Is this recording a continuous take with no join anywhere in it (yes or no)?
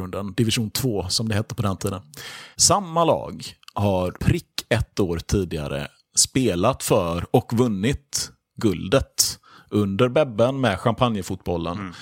no